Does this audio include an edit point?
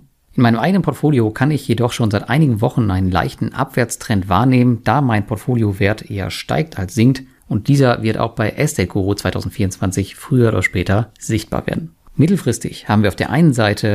no; 0 cuts

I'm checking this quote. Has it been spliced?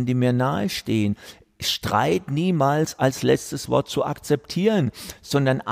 no; 0 cuts

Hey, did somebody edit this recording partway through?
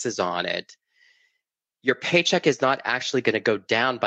no; 0 cuts

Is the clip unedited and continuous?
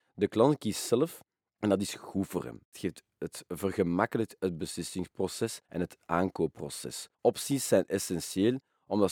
no; 2 cuts; at 5.7 s, 7.1 s

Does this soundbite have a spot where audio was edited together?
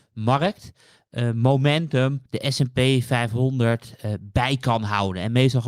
yes; 1 cut; at 2.3 s

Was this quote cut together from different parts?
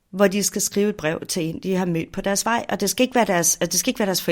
no; 0 cuts

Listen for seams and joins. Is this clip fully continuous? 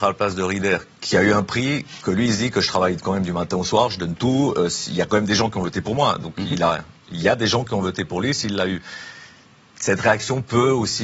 yes; 0 cuts

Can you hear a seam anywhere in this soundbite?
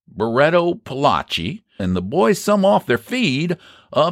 yes; 1 cut; at 1.8 s

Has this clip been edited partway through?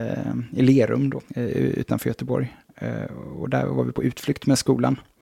yes; 1 cut; at 1.2 s

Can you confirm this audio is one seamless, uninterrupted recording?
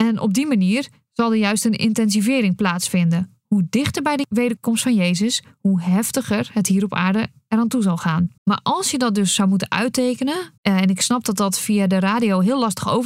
no; 2 cuts; at 8.4 s, 10.6 s

